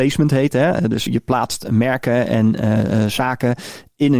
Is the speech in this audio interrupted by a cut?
yes; 2 cuts; at 1.1 s, 2.6 s

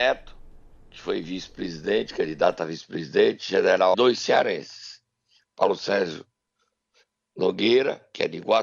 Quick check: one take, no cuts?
no; 1 cut; at 3.9 s

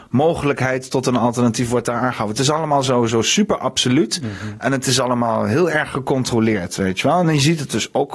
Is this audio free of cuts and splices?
yes; 0 cuts

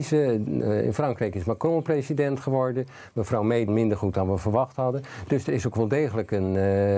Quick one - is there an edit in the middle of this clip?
yes; 1 cut; at 3.7 s

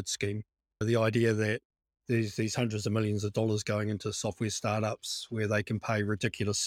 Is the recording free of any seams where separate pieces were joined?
yes; 0 cuts

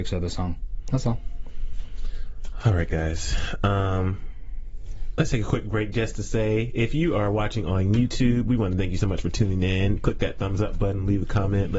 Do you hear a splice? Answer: no; 0 cuts

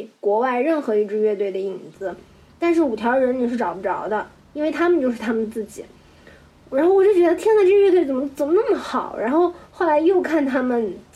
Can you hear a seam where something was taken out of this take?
no; 0 cuts

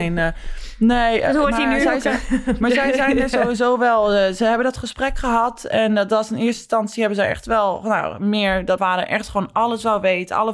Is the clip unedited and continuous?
no; 1 cut; at 8.8 s

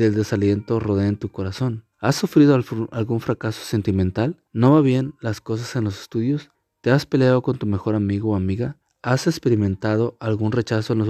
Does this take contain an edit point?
yes; 4 cuts; at 1.9 s, 4.5 s, 6.5 s, 8.8 s

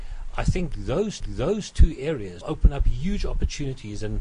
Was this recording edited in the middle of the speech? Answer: yes; 2 cuts; at 1.2 s, 2.4 s

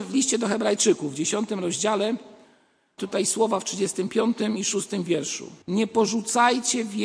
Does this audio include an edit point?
yes; 2 cuts; at 3.0 s, 5.6 s

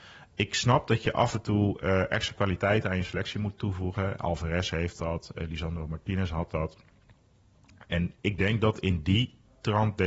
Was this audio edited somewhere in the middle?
no; 0 cuts

